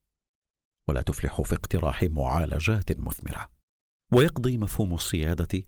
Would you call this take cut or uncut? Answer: uncut